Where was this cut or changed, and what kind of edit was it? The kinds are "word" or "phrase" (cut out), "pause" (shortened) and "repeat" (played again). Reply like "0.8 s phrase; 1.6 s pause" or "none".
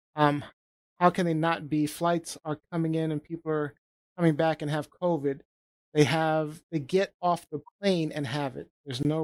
none